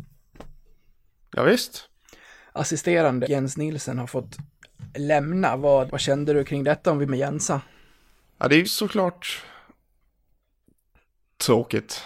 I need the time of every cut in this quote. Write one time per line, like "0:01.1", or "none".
0:03.2
0:05.9
0:07.1
0:08.6

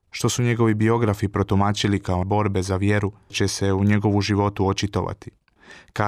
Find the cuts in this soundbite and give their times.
0:02.2
0:03.3

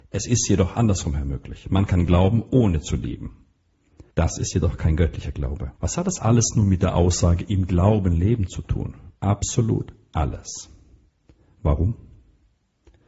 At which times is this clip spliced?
0:04.1
0:05.8
0:09.2

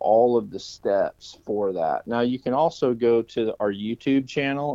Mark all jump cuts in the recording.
none

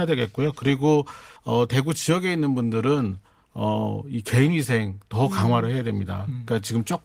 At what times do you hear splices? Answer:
0:01.4

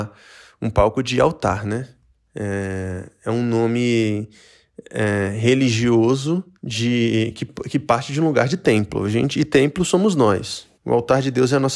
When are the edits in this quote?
0:02.1
0:06.5
0:10.7

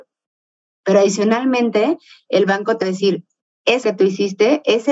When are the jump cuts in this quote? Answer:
0:02.8
0:03.8

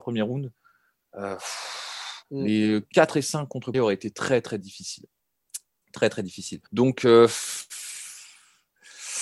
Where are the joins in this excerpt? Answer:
0:02.2
0:02.9
0:03.7
0:06.7

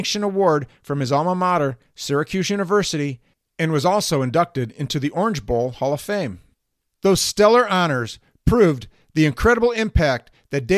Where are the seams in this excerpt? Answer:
none

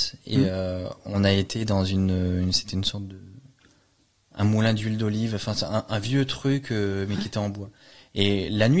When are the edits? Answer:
none

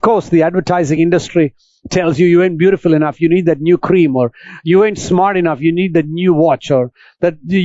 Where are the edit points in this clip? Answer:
none

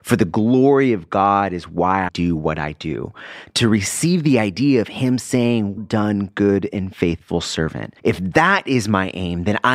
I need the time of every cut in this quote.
0:02.1
0:05.8
0:08.0

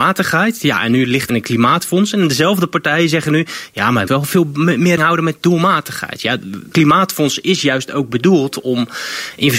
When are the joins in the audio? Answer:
0:01.3
0:04.1
0:05.0
0:06.7

